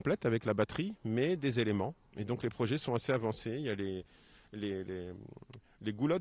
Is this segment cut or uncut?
uncut